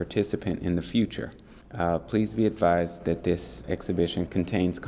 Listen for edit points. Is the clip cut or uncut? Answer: cut